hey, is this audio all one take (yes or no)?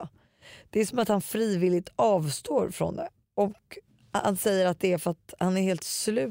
yes